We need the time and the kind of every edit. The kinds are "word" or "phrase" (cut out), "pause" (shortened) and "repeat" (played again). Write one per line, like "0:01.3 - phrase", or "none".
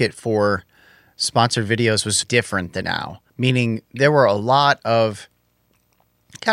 0:02.2 - word
0:02.8 - phrase
0:03.3 - pause